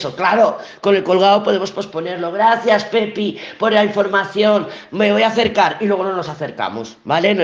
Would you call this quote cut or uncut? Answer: uncut